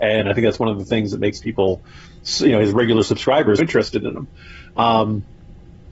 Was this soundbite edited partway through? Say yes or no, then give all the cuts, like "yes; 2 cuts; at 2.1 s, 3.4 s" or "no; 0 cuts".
yes; 1 cut; at 3.6 s